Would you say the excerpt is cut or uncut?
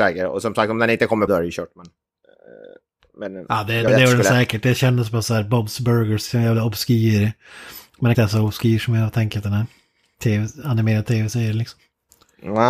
cut